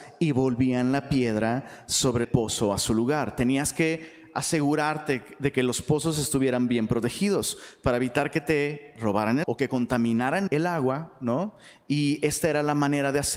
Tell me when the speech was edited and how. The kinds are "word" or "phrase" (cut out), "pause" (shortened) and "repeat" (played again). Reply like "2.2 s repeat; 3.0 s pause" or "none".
2.2 s phrase; 9.4 s word; 10.5 s word

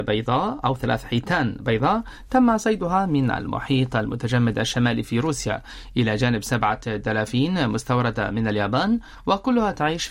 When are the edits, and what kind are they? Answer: none

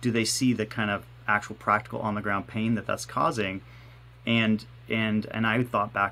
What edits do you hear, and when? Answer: none

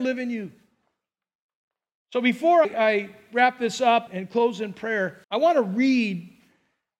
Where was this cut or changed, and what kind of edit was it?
2.6 s word; 4.1 s word; 5.2 s pause

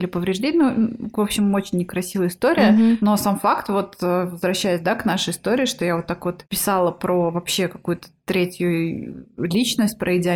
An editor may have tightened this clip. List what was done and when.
none

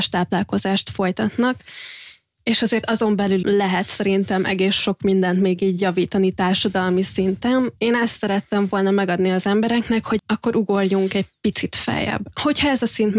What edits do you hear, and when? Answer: 3.4 s word; 7.8 s pause; 10.2 s word

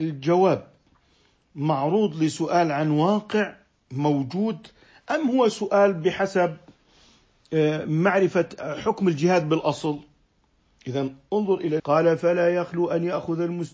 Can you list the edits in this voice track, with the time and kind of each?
11.8 s word

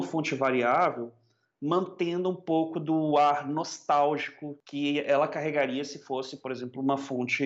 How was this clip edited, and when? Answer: none

